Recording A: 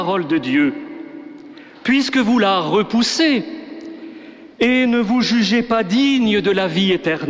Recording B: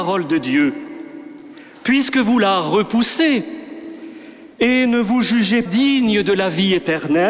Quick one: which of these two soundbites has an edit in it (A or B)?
B